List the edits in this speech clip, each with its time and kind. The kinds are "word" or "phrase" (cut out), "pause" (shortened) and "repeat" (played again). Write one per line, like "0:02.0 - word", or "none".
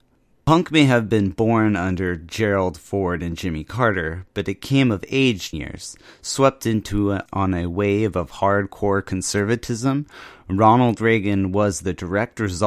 0:05.5 - phrase
0:07.3 - word